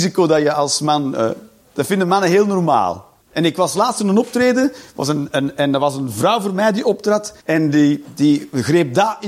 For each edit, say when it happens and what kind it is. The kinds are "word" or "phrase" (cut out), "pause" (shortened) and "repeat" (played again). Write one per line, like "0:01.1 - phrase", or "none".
0:03.2 - pause
0:07.4 - pause